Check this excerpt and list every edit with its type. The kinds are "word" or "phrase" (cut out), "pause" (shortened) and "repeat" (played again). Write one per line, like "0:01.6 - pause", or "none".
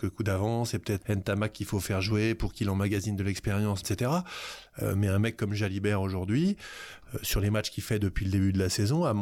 0:01.0 - word
0:03.8 - word